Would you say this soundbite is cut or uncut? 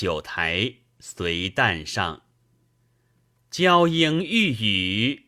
uncut